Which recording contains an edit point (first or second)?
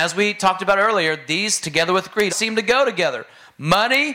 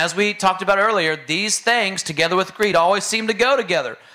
first